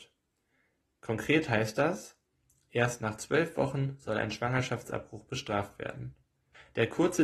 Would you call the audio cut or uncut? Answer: uncut